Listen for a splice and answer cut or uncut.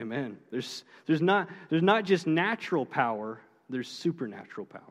uncut